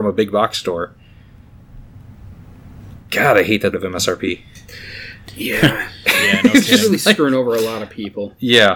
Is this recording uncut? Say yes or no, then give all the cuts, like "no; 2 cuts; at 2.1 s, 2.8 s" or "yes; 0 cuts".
no; 1 cut; at 3.7 s